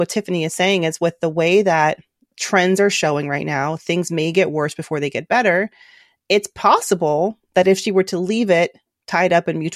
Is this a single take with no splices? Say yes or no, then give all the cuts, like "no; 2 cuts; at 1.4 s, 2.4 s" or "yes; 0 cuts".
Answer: yes; 0 cuts